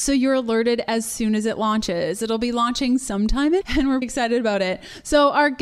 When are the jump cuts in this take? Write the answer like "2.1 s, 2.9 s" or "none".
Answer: 3.6 s, 4.0 s